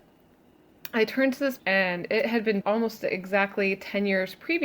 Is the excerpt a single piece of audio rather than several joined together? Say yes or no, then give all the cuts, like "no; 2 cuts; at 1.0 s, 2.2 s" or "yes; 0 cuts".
no; 2 cuts; at 1.6 s, 2.6 s